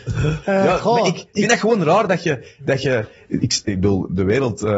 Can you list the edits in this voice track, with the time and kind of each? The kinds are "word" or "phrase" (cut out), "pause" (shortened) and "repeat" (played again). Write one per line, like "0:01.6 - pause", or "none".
0:03.4 - word